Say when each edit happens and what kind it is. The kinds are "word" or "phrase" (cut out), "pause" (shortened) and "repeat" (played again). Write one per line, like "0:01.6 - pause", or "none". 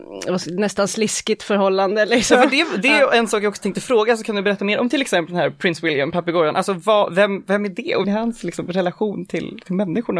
0:08.0 - word